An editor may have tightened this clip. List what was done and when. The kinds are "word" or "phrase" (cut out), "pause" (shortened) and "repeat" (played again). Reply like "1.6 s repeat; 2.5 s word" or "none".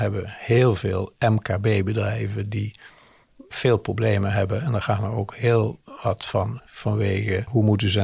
6.6 s word